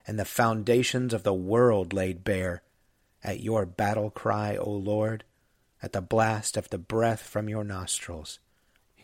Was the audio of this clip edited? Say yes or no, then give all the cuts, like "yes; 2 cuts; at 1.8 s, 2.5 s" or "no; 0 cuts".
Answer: no; 0 cuts